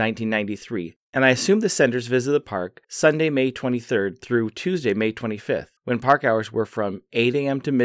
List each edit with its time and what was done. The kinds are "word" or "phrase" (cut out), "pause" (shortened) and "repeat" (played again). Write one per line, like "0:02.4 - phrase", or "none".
0:01.0 - pause
0:02.8 - pause
0:05.8 - pause